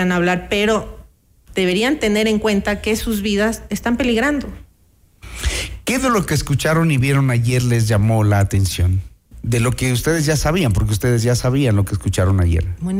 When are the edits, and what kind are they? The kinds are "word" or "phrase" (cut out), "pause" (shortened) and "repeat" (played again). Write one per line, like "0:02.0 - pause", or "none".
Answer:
none